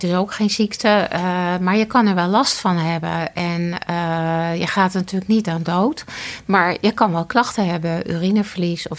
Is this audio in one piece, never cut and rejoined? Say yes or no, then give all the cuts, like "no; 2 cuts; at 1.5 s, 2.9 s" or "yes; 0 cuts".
yes; 0 cuts